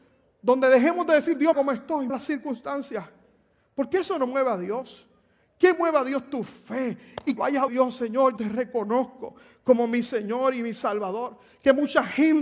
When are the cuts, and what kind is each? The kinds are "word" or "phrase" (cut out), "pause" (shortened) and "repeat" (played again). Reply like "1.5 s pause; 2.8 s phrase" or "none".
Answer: 1.5 s word; 2.1 s word; 7.4 s word; 7.7 s word; 8.4 s word